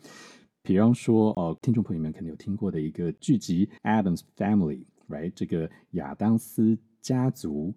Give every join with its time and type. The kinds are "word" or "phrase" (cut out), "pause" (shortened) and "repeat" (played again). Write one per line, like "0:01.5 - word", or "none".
0:03.8 - pause